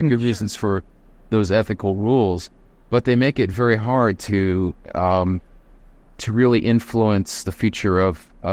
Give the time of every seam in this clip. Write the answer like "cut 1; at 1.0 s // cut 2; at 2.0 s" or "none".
none